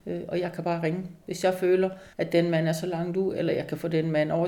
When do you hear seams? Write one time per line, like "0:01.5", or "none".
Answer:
0:02.1